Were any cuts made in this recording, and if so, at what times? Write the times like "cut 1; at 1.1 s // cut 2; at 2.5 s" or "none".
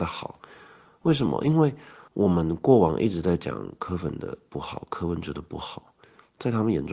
cut 1; at 2.1 s